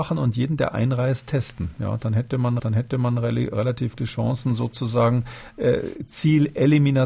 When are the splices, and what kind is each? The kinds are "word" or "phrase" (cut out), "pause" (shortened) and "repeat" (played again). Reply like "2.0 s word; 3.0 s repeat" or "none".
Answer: 2.6 s repeat; 4.0 s word